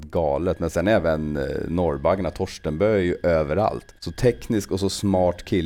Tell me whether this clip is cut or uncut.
cut